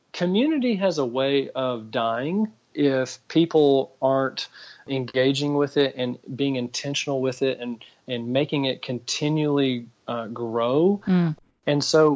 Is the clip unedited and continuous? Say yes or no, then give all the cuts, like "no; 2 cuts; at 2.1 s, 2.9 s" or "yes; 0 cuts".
yes; 0 cuts